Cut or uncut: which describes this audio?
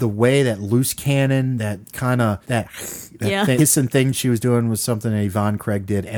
cut